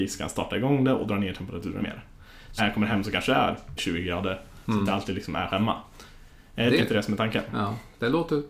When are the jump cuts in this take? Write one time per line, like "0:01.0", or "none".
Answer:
0:01.8
0:02.6
0:03.8
0:05.5
0:06.8

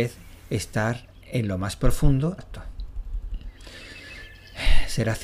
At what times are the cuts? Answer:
0:02.4

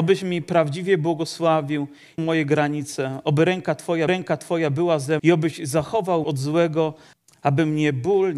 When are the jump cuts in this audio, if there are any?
0:02.2
0:04.1
0:05.2
0:06.2
0:07.1

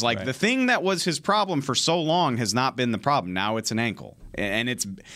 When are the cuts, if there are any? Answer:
none

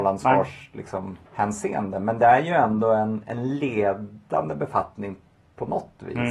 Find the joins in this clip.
0:01.3

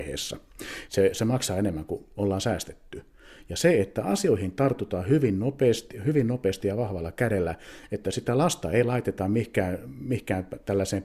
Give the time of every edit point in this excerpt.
none

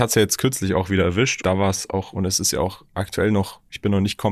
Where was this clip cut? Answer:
0:01.4

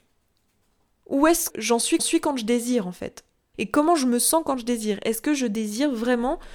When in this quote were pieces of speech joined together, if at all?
0:01.5
0:02.0

